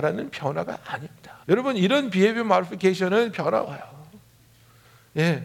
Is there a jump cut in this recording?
yes; 2 cuts; at 1.4 s, 3.3 s

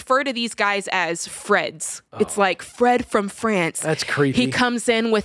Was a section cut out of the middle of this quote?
yes; 1 cut; at 2.1 s

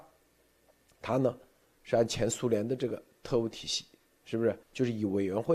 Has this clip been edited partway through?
yes; 1 cut; at 4.6 s

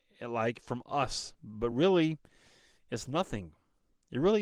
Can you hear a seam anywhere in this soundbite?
no; 0 cuts

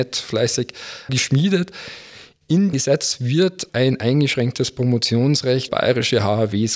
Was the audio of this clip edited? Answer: yes; 4 cuts; at 1.1 s, 2.7 s, 3.7 s, 5.7 s

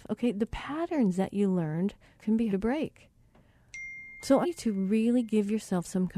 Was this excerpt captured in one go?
no; 3 cuts; at 2.2 s, 2.5 s, 4.4 s

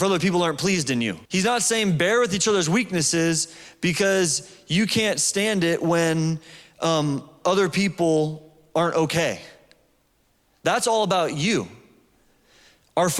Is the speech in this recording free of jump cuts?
no; 1 cut; at 1.2 s

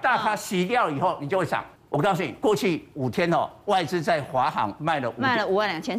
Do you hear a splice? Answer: yes; 1 cut; at 1.8 s

